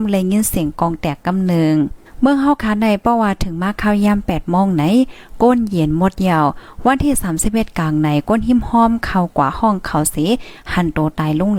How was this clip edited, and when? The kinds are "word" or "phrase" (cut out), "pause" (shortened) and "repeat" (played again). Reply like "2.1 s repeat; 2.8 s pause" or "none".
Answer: 2.1 s pause